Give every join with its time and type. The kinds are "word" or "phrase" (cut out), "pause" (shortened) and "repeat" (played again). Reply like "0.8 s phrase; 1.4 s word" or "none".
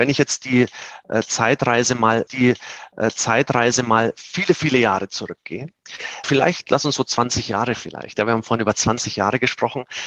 2.3 s repeat; 6.2 s word